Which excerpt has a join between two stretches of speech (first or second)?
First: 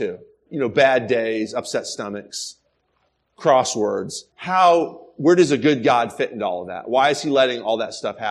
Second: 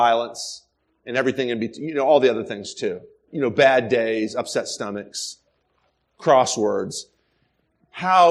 first